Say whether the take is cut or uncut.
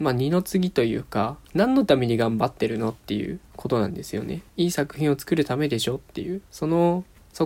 cut